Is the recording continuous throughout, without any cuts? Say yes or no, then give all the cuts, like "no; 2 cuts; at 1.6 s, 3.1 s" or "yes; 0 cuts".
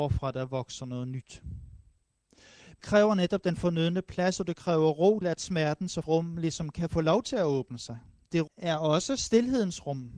no; 4 cuts; at 2.8 s, 5.2 s, 6.0 s, 8.5 s